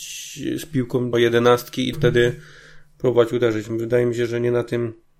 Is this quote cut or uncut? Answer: cut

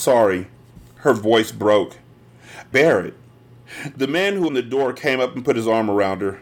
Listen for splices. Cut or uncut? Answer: cut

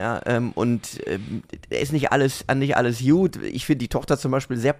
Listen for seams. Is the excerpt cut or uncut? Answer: uncut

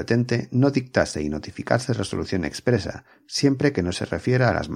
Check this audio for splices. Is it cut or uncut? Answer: uncut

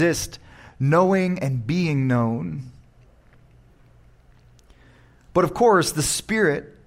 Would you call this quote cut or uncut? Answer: uncut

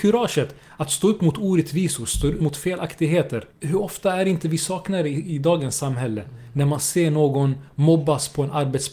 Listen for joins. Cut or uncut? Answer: cut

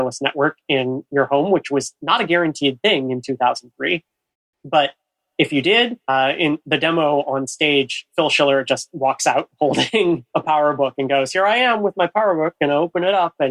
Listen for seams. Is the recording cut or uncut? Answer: cut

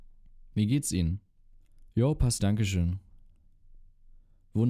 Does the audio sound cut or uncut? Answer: cut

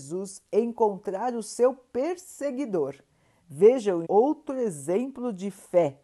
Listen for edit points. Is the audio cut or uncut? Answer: cut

